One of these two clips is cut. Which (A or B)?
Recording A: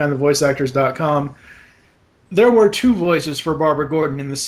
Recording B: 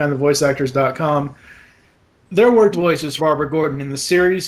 B